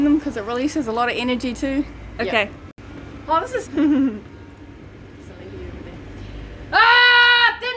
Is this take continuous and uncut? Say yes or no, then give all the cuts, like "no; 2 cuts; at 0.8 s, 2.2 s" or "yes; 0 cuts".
no; 2 cuts; at 2.2 s, 3.6 s